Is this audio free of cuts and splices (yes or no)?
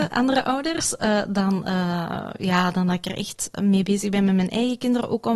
yes